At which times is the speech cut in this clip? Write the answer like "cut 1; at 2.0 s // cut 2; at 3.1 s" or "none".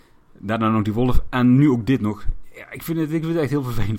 none